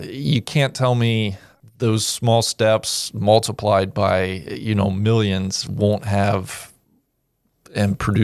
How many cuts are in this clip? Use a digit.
1